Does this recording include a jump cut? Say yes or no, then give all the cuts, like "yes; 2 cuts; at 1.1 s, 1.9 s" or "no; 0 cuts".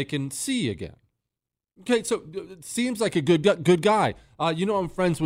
no; 0 cuts